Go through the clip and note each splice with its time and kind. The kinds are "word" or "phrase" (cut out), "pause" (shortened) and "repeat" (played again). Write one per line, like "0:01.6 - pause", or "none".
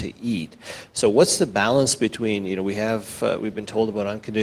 none